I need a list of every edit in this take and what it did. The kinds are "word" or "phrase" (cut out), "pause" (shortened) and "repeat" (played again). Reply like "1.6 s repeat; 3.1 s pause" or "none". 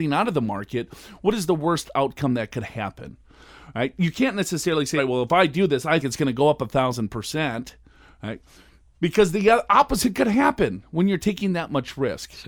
5.0 s word; 6.0 s word